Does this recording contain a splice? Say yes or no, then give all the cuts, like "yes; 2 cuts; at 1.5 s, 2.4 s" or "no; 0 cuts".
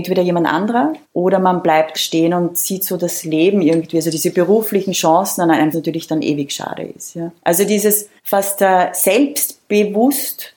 yes; 5 cuts; at 1.0 s, 1.9 s, 5.7 s, 7.4 s, 8.2 s